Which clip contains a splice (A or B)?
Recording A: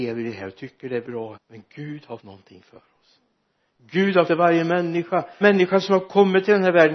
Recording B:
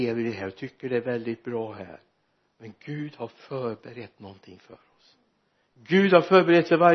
A